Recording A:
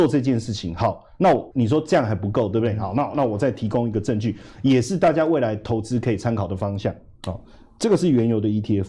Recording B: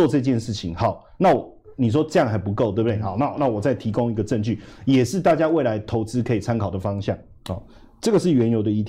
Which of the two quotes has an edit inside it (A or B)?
A